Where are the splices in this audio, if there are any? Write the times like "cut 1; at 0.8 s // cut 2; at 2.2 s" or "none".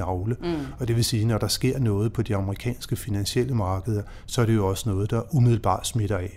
none